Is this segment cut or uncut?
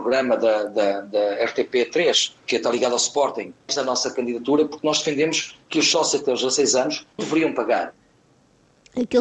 cut